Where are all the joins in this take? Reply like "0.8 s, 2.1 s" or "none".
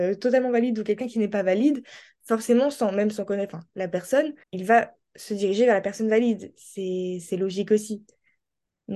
4.4 s